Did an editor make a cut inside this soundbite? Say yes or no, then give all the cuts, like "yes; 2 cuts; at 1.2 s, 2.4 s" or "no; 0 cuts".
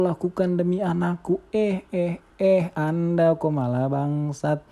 no; 0 cuts